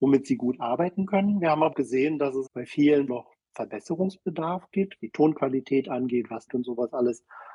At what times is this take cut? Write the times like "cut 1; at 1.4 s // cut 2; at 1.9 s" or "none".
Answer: cut 1; at 1.7 s // cut 2; at 2.5 s // cut 3; at 3.1 s // cut 4; at 5.0 s // cut 5; at 6.5 s